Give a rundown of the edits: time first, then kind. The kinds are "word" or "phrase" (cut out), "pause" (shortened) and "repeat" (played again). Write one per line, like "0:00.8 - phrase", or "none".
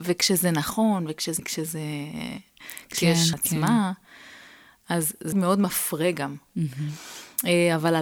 0:01.4 - word
0:03.3 - phrase
0:05.3 - phrase